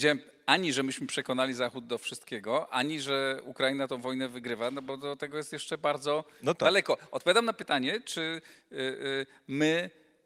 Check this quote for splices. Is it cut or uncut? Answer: uncut